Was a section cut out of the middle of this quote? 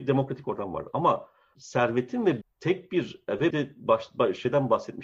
yes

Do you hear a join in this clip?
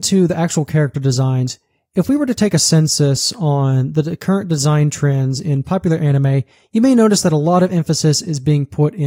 no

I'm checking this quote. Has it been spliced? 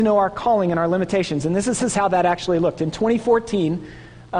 yes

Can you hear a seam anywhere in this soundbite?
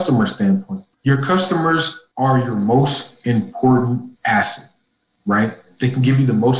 yes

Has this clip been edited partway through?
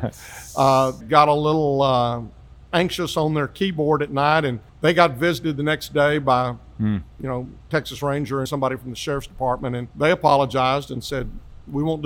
yes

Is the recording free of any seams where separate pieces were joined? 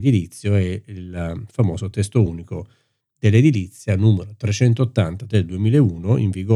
yes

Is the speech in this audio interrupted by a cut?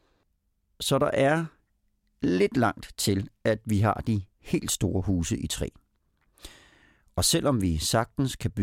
no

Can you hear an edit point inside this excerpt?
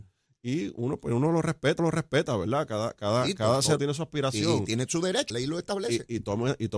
yes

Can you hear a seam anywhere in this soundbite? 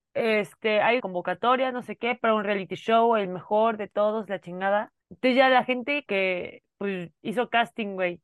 yes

